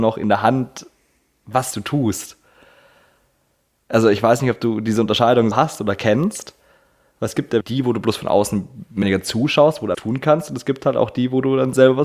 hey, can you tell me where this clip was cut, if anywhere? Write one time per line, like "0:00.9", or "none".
0:05.5
0:07.6
0:09.0
0:09.9